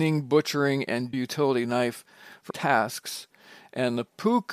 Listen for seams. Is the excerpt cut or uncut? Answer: cut